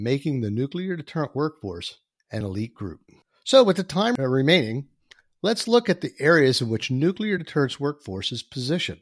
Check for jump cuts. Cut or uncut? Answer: uncut